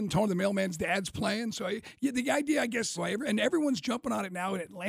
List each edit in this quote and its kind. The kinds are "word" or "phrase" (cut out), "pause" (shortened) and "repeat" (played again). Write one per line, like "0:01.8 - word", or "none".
0:03.0 - word